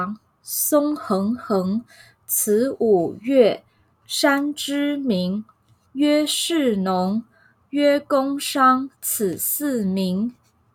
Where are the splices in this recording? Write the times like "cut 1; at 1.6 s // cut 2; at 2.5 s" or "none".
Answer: cut 1; at 8.9 s